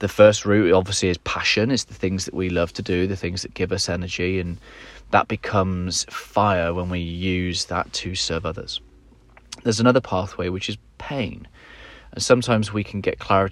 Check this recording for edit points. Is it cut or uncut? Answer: uncut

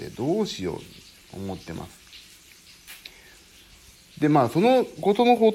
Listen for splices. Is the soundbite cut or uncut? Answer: uncut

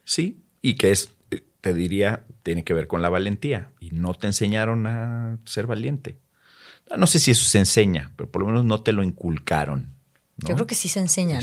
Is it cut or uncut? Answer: uncut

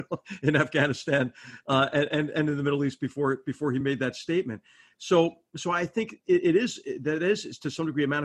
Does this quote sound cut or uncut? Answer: uncut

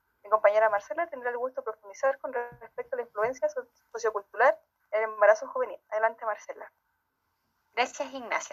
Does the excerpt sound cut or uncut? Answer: uncut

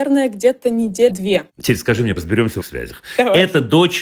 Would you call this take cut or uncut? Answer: cut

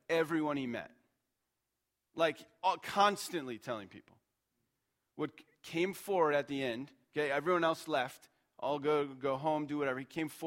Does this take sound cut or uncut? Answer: uncut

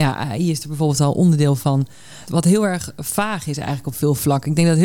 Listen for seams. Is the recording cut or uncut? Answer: uncut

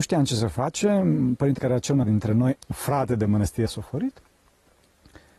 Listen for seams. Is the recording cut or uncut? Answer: cut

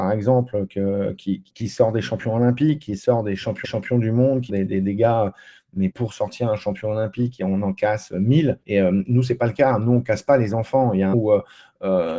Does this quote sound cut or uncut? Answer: cut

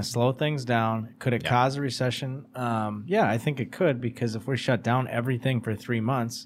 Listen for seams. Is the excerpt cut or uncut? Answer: uncut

